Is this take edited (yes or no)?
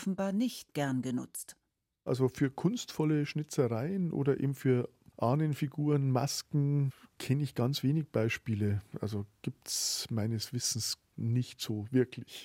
no